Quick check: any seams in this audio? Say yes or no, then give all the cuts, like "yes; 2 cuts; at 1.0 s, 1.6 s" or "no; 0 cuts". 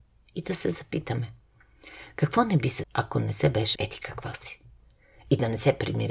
yes; 2 cuts; at 2.8 s, 3.8 s